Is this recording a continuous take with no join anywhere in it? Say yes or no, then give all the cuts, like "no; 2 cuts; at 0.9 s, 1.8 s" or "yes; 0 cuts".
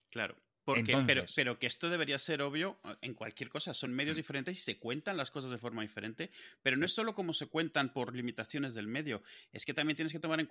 yes; 0 cuts